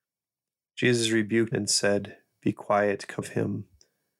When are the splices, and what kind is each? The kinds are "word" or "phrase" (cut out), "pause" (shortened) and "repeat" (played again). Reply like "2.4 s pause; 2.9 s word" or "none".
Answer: 1.5 s word; 3.2 s word